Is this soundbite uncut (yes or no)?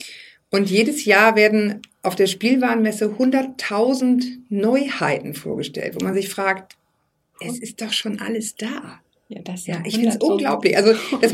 yes